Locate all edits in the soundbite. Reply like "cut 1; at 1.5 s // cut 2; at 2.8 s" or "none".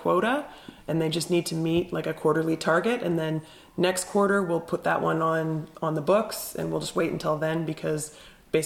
none